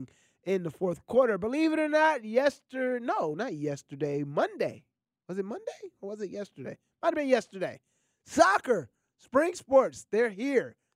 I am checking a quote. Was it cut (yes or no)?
no